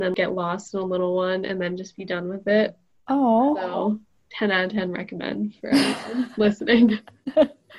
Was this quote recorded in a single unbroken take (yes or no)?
yes